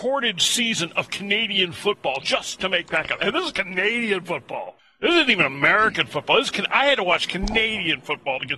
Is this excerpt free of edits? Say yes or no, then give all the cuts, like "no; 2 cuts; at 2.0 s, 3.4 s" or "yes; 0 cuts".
yes; 0 cuts